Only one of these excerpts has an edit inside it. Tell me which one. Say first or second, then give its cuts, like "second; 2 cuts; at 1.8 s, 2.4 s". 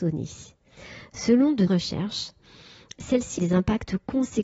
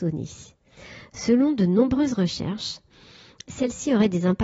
first; 2 cuts; at 1.7 s, 3.4 s